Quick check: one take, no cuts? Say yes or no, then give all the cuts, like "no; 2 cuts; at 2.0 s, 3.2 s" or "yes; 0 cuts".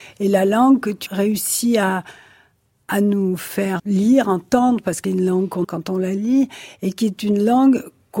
no; 4 cuts; at 1.1 s, 3.8 s, 5.0 s, 5.6 s